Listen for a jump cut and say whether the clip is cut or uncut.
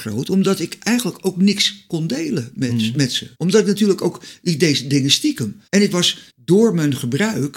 cut